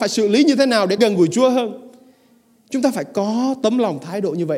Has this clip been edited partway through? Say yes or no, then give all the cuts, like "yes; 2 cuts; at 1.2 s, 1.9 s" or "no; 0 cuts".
yes; 1 cut; at 1.0 s